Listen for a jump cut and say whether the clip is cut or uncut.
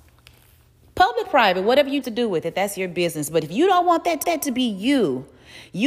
cut